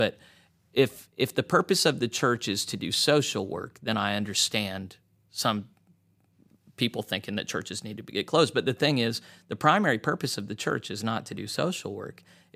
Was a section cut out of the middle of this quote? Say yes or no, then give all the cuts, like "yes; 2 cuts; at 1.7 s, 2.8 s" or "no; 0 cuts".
no; 0 cuts